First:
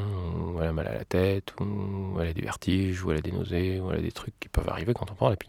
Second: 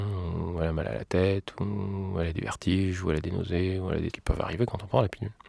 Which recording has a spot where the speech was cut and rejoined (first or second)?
second